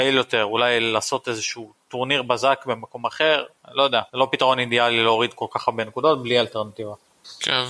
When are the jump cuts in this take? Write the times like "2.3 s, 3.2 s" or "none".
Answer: 4.1 s